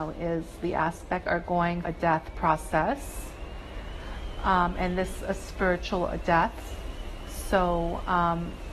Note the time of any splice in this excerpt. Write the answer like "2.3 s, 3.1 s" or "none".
1.3 s, 1.8 s, 5.2 s